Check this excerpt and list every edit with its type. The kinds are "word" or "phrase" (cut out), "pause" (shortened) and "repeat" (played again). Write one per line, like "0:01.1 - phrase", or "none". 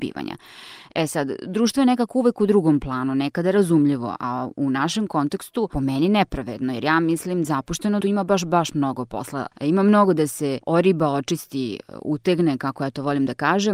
0:07.4 - phrase
0:08.0 - phrase
0:09.5 - pause
0:10.6 - pause